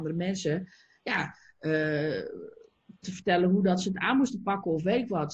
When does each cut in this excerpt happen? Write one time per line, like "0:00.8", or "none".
0:03.0